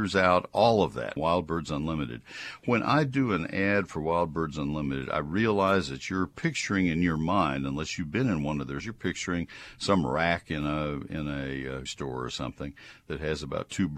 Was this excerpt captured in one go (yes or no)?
no